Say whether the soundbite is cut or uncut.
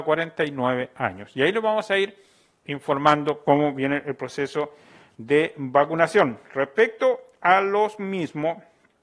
uncut